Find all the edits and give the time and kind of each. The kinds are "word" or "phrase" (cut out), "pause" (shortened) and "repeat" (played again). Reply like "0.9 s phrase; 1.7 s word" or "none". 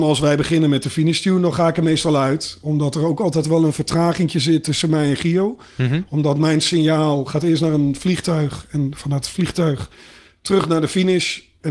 none